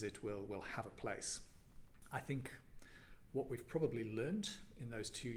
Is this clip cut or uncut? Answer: uncut